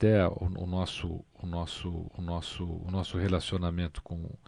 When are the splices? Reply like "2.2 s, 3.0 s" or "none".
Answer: 2.1 s